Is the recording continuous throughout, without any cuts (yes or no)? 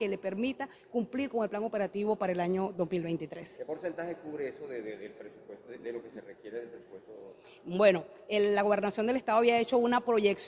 yes